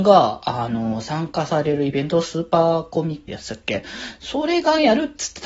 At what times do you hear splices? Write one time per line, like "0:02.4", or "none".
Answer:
0:03.3